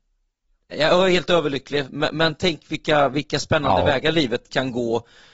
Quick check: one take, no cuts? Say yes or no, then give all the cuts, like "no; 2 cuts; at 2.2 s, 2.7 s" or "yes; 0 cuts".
yes; 0 cuts